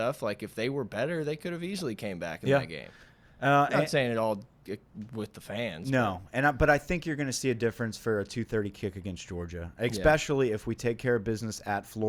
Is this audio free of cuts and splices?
yes; 0 cuts

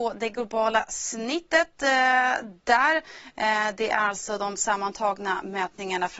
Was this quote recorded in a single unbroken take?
yes; 0 cuts

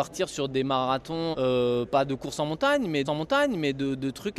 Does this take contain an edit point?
yes; 2 cuts; at 1.3 s, 3.0 s

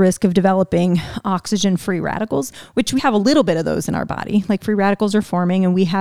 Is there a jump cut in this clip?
yes; 1 cut; at 3.0 s

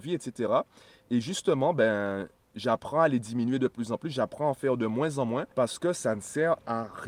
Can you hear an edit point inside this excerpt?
yes; 1 cut; at 5.5 s

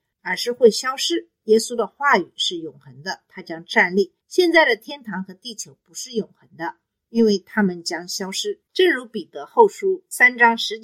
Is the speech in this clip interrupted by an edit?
no; 0 cuts

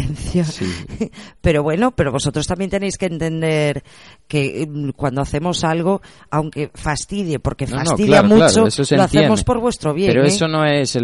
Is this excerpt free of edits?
yes; 0 cuts

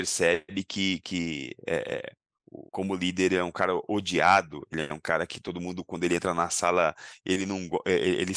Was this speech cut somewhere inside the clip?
yes; 1 cut; at 2.7 s

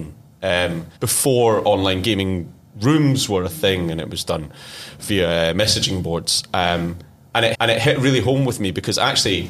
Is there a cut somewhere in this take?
yes; 2 cuts; at 1.0 s, 7.5 s

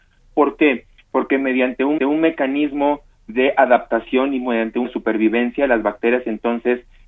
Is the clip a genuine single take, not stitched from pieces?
no; 2 cuts; at 2.0 s, 4.8 s

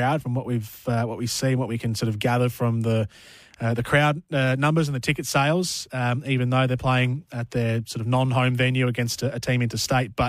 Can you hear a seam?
no; 0 cuts

